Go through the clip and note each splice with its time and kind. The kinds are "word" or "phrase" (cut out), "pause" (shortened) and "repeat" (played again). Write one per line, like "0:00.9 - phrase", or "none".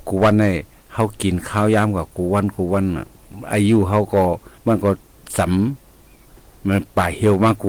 0:04.6 - pause